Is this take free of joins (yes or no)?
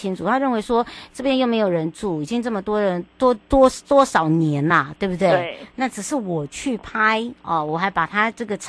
yes